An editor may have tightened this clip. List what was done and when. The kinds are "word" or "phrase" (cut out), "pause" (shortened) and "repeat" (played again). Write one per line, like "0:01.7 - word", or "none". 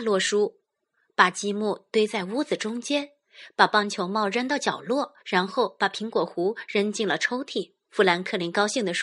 0:05.2 - pause
0:07.8 - pause